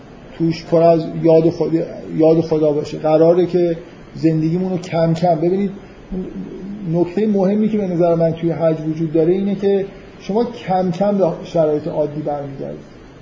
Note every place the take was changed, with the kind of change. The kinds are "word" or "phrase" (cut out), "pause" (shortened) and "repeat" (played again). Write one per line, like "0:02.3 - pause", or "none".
none